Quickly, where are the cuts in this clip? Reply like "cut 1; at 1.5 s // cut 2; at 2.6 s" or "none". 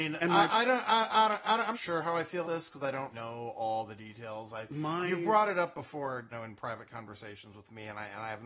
cut 1; at 1.7 s // cut 2; at 2.4 s // cut 3; at 3.1 s // cut 4; at 6.3 s